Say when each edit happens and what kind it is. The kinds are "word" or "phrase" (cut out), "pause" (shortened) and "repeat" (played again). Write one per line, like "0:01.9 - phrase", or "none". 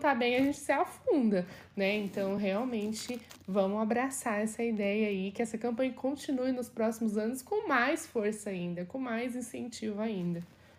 none